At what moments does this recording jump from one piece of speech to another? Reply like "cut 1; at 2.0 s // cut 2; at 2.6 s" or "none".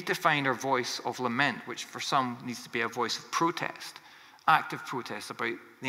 none